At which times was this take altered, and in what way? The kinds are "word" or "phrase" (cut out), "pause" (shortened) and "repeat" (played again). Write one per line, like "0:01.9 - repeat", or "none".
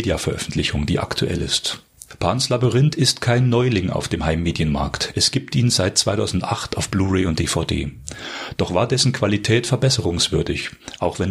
none